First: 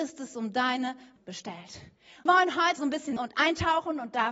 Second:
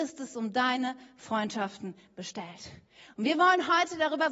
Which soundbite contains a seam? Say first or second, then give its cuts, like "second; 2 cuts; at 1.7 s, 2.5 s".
first; 4 cuts; at 1.2 s, 2.3 s, 2.8 s, 3.2 s